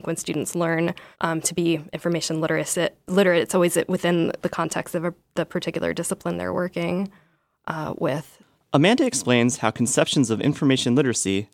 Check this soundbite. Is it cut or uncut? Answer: cut